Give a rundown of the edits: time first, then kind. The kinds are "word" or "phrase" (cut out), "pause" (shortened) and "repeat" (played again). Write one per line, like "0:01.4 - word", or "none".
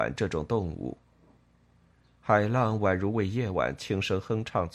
none